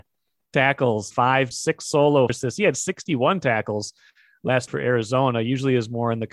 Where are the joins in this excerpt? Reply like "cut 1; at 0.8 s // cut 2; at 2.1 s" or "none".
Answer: cut 1; at 1.1 s // cut 2; at 1.5 s // cut 3; at 2.3 s // cut 4; at 4.7 s